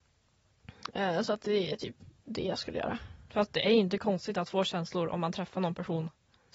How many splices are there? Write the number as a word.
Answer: one